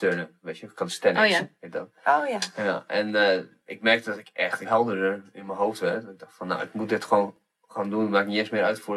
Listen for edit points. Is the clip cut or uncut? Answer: cut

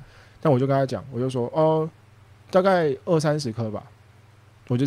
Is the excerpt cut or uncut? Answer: uncut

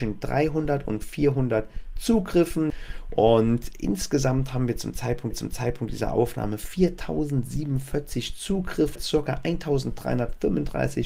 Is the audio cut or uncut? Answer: cut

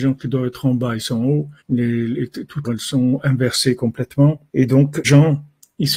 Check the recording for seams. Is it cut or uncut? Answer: cut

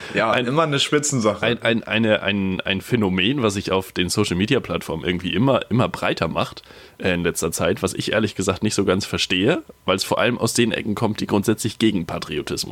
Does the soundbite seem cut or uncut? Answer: uncut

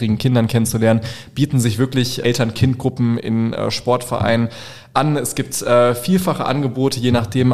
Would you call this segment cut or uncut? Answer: cut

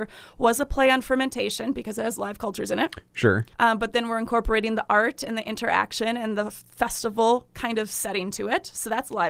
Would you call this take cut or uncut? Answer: cut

